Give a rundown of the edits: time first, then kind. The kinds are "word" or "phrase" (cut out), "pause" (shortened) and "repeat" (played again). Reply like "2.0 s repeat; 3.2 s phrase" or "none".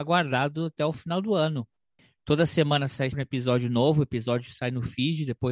3.1 s word